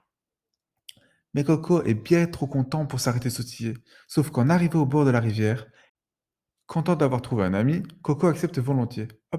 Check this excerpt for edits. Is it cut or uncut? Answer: uncut